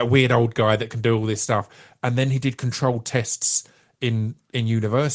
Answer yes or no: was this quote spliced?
no